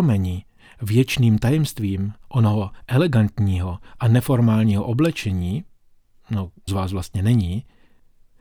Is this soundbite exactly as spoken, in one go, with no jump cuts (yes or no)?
no